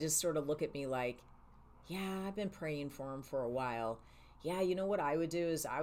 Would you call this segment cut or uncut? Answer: uncut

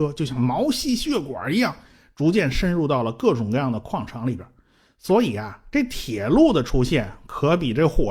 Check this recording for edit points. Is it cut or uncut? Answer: uncut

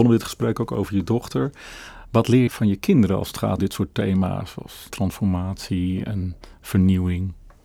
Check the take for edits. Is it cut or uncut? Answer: cut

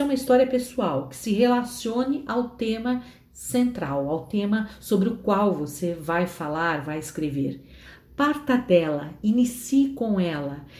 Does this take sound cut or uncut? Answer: uncut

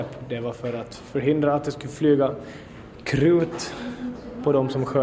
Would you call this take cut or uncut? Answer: uncut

